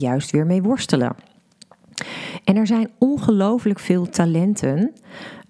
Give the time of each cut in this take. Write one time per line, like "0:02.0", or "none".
none